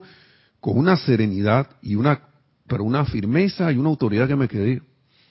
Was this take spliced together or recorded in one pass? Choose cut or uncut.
uncut